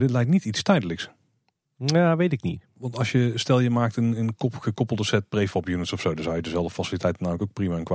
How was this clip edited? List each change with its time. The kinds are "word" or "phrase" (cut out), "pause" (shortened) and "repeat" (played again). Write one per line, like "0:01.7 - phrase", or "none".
none